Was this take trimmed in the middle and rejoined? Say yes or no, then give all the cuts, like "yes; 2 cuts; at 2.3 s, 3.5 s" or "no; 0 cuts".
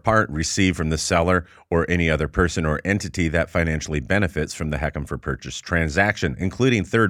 no; 0 cuts